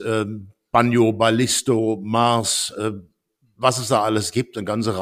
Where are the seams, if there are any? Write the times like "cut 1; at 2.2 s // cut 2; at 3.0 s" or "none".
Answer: none